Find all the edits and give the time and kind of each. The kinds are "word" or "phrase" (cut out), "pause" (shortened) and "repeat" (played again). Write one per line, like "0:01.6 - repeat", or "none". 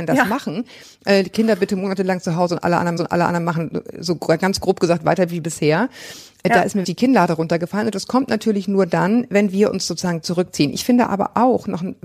0:03.0 - repeat
0:06.8 - word

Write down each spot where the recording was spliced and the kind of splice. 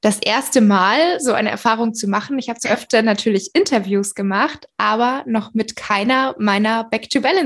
0:02.6 - word

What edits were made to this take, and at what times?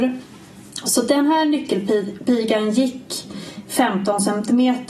none

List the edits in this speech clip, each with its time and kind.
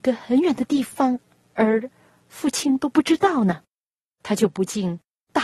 none

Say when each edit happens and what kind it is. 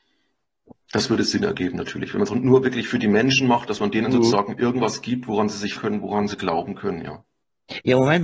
0:02.3 - word
0:05.8 - word

